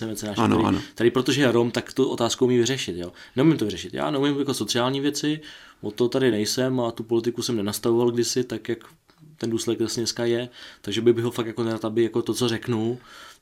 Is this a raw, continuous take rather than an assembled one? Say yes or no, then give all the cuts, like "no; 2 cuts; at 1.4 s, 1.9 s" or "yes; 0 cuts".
yes; 0 cuts